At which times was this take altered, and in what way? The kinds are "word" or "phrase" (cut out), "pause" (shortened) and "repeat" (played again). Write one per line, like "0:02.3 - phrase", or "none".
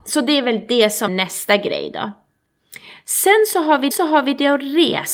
0:01.1 - word
0:03.9 - repeat